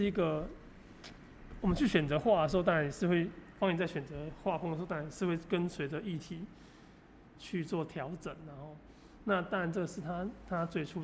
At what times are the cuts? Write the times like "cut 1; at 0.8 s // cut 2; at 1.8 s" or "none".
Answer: none